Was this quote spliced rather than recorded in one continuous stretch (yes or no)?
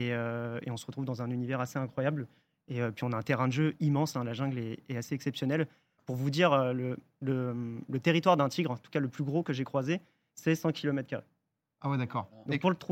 no